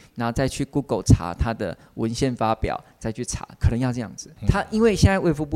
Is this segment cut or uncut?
cut